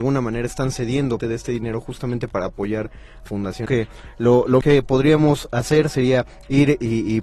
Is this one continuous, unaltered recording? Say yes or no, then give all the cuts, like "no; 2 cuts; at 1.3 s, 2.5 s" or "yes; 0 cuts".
no; 4 cuts; at 1.2 s, 3.3 s, 3.7 s, 4.6 s